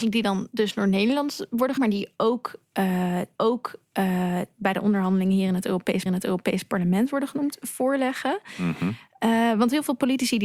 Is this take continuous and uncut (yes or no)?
no